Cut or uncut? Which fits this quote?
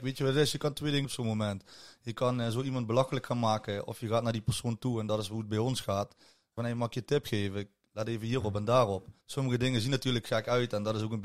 cut